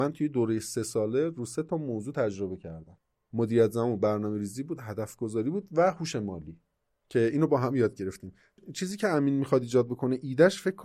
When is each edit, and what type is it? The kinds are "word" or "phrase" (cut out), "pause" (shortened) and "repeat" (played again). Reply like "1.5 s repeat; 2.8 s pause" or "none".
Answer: none